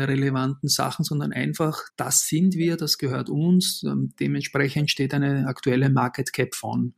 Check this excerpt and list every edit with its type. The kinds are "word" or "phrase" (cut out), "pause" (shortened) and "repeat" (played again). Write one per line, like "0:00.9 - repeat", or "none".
0:01.9 - pause